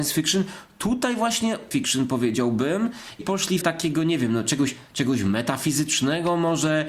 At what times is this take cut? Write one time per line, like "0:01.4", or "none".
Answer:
0:01.7
0:03.2
0:03.6